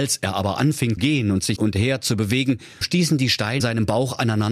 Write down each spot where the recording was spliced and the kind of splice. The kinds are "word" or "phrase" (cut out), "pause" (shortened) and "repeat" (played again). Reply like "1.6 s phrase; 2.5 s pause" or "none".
1.0 s word; 1.6 s word; 2.8 s word; 3.6 s word